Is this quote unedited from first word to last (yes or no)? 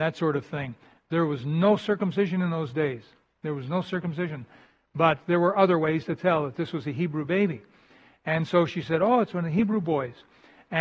yes